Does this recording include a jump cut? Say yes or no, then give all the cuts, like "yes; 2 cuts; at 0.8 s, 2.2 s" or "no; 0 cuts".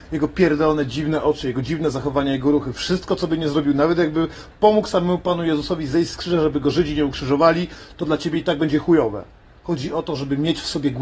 no; 0 cuts